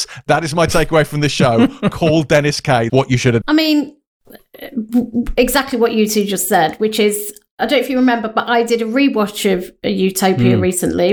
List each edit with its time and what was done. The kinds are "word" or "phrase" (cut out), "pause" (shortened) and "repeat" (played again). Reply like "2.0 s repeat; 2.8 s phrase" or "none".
2.9 s word; 3.4 s word